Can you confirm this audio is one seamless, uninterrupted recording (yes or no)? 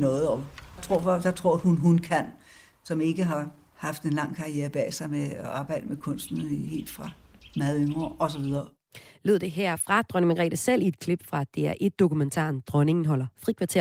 yes